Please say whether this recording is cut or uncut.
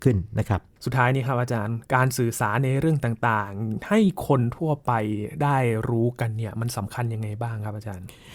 cut